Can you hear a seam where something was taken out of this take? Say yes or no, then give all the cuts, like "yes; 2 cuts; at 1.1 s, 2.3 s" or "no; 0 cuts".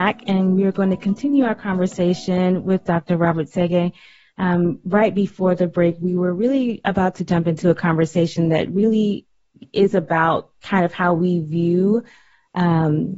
no; 0 cuts